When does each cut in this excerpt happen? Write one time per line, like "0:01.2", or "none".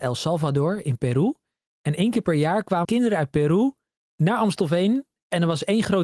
0:02.8